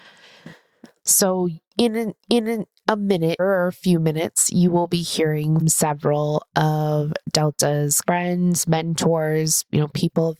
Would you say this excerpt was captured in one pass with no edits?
no; 4 cuts; at 2.2 s, 3.4 s, 5.6 s, 8.0 s

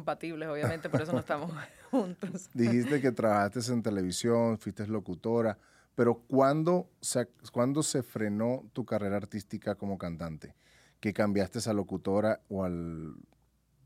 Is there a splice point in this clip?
no; 0 cuts

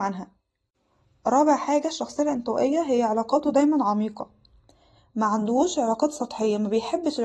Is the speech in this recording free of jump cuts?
yes; 0 cuts

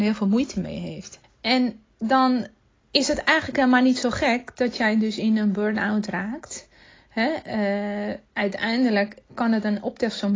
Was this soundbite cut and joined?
yes; 2 cuts; at 1.2 s, 8.3 s

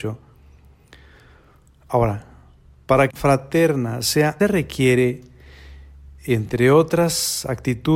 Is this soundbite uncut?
no; 2 cuts; at 3.1 s, 4.4 s

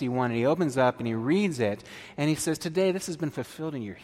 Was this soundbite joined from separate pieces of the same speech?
no; 0 cuts

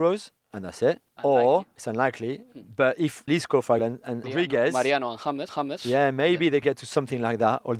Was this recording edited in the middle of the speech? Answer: yes; 7 cuts; at 1.1 s, 1.7 s, 3.3 s, 3.8 s, 4.2 s, 5.5 s, 6.6 s

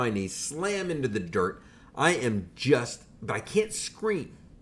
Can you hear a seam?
no; 0 cuts

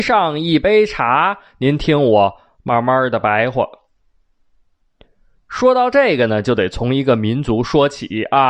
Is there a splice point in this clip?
no; 0 cuts

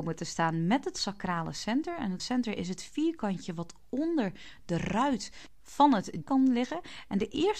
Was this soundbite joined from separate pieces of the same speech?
yes; 2 cuts; at 2.2 s, 6.2 s

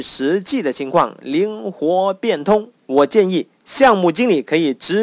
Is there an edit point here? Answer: yes; 1 cut; at 2.8 s

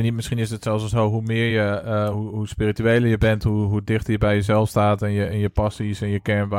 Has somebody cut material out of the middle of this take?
no; 0 cuts

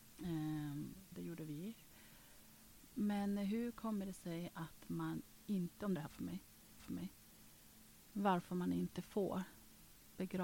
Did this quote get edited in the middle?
yes; 3 cuts; at 1.1 s, 6.0 s, 6.8 s

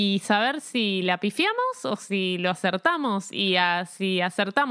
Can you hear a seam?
no; 0 cuts

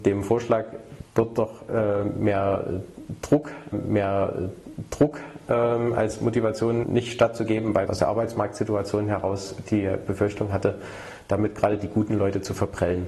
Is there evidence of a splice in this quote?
yes; 4 cuts; at 1.1 s, 3.7 s, 6.8 s, 7.9 s

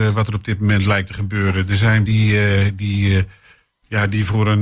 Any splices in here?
yes; 1 cut; at 2.1 s

